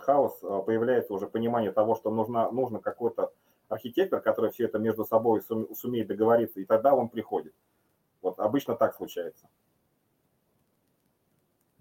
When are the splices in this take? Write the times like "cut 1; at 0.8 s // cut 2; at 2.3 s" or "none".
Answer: none